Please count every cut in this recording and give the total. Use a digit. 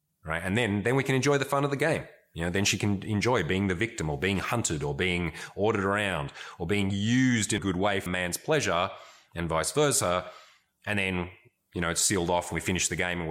2